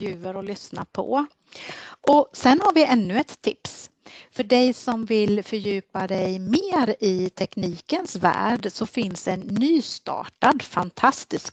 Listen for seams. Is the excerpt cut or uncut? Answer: uncut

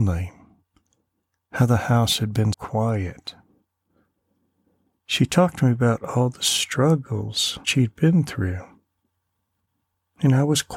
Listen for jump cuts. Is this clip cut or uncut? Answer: cut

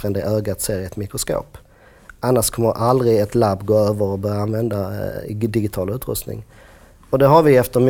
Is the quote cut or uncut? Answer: uncut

